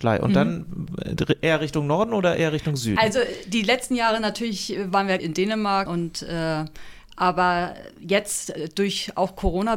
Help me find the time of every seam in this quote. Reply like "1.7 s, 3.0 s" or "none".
5.2 s, 5.9 s